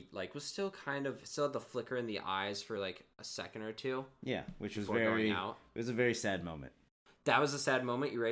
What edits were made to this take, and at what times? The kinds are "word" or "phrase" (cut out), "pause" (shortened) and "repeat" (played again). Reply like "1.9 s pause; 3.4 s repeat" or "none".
none